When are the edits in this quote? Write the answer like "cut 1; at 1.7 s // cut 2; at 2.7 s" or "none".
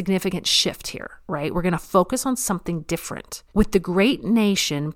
cut 1; at 3.5 s